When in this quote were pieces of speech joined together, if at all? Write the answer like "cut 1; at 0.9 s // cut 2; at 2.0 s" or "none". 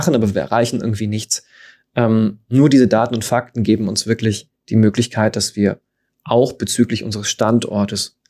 none